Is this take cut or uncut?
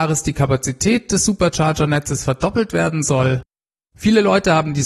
uncut